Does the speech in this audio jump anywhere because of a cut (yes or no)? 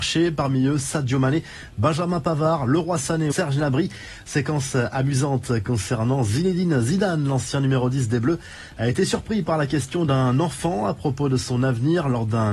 yes